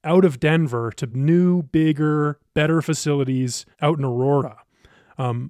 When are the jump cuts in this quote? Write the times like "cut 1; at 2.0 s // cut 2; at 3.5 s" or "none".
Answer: cut 1; at 1.1 s // cut 2; at 3.7 s